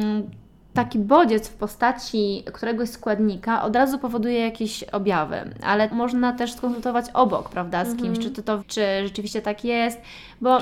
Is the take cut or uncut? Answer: cut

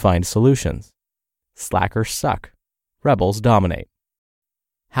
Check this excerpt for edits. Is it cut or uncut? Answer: uncut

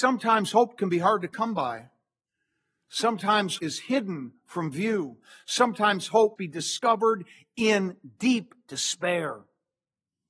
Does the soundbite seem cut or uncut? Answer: cut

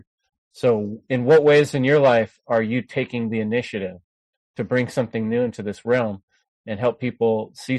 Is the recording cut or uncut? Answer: uncut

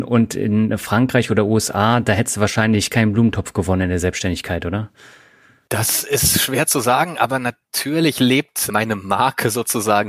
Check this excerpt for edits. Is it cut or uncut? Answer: uncut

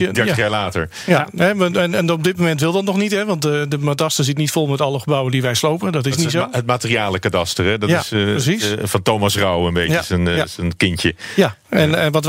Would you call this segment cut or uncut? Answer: uncut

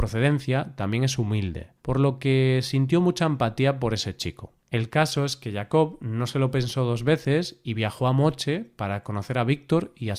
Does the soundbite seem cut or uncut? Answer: cut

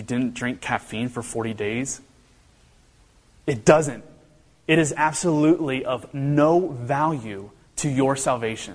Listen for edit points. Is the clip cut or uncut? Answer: uncut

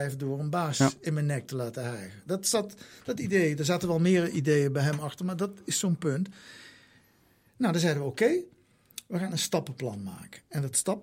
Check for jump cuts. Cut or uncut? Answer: uncut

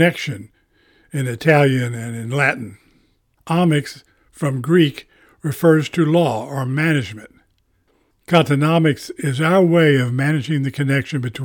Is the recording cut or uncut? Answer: uncut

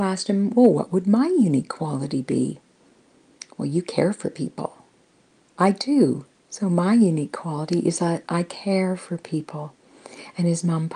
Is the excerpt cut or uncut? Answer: uncut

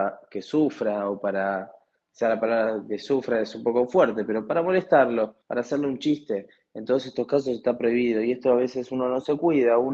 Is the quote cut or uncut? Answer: cut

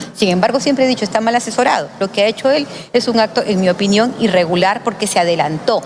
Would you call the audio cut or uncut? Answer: uncut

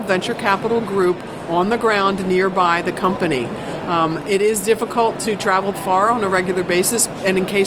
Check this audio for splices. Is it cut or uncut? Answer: cut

